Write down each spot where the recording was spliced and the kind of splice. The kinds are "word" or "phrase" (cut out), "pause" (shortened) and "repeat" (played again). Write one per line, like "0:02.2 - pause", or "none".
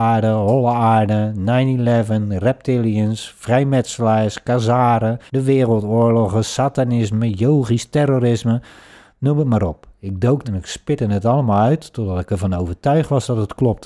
0:05.3 - pause
0:10.4 - word